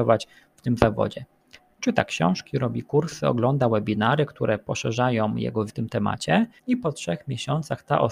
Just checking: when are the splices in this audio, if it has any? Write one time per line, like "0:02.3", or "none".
0:05.7
0:06.6